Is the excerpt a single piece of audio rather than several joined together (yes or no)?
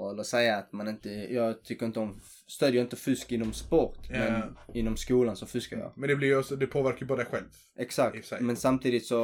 yes